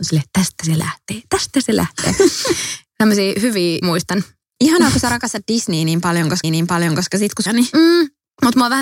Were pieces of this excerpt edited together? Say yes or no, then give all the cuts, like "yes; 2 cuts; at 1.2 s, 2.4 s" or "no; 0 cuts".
yes; 3 cuts; at 3.8 s, 6.4 s, 7.5 s